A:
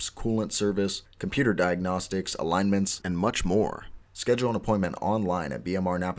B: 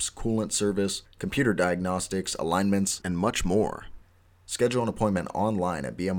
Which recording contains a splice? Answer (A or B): A